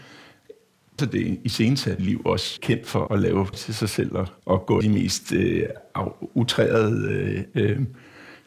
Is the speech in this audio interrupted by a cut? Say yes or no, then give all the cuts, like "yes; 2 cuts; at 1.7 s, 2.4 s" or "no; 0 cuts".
yes; 7 cuts; at 1.0 s, 2.0 s, 2.6 s, 3.1 s, 3.5 s, 4.4 s, 4.8 s